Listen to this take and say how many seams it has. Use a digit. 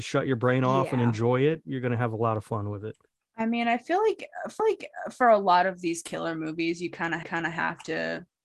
2